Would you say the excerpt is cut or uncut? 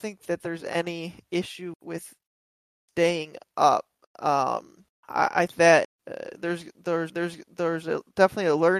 cut